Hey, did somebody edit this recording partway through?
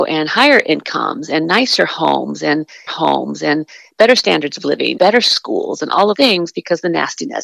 yes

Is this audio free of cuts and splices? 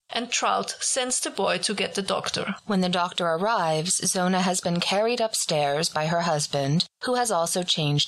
yes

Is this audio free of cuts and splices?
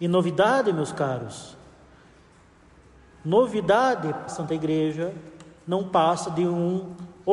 no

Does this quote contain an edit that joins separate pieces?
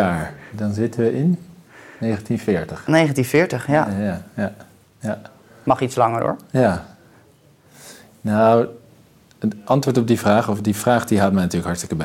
no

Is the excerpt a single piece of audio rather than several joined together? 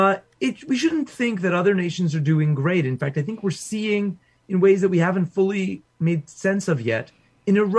yes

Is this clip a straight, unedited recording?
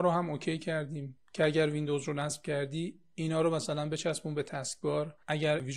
yes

